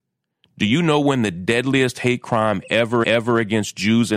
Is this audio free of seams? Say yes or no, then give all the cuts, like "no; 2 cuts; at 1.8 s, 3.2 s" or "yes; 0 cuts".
no; 1 cut; at 3.0 s